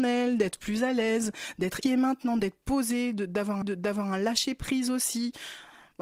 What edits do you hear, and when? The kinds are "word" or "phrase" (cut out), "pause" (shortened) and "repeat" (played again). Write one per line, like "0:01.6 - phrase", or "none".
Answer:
0:01.8 - word
0:03.6 - repeat